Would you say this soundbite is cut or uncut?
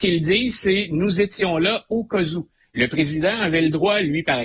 uncut